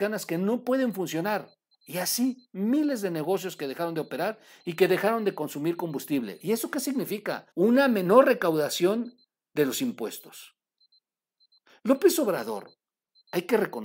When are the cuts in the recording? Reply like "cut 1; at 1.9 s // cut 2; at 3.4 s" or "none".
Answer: cut 1; at 1.7 s // cut 2; at 7.5 s